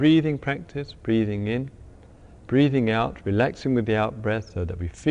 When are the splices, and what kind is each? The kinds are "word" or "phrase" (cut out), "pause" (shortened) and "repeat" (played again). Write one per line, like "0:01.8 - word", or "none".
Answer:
none

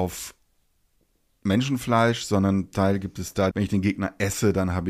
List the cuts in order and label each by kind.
0:02.7 - word
0:03.5 - phrase

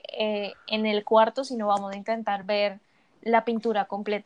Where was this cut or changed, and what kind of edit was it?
none

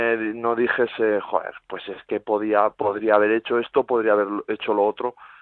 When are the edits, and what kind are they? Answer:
none

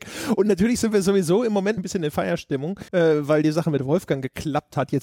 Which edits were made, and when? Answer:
0:01.8 - word
0:02.9 - pause

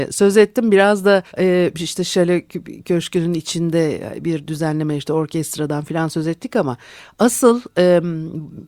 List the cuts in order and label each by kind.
0:01.3 - pause

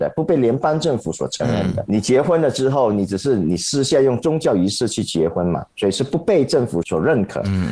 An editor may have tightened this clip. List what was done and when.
0:01.9 - word

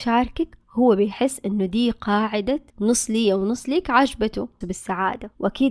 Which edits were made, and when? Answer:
0:02.7 - pause
0:04.6 - word

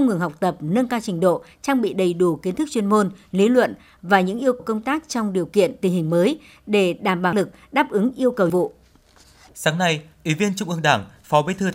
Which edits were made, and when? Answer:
0:04.6 - word
0:07.3 - word
0:08.5 - word

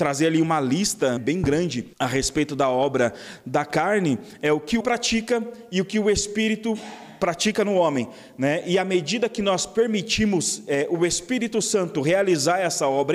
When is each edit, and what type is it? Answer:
0:01.2 - word
0:01.9 - pause
0:04.8 - word

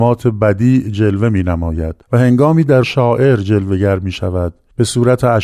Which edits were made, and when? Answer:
0:02.0 - pause
0:02.8 - word

